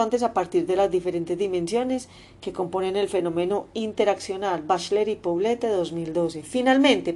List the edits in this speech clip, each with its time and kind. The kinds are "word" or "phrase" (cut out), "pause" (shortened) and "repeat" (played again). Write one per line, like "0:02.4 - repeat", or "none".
none